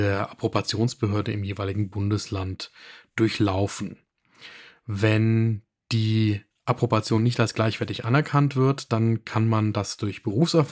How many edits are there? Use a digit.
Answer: 0